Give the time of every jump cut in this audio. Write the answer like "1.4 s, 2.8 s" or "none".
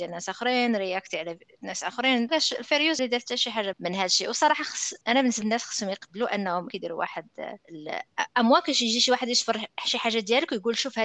2.3 s, 3.0 s, 3.7 s, 5.0 s, 5.4 s, 6.7 s, 7.6 s